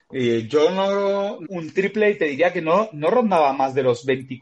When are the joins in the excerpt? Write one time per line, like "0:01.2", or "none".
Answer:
0:01.4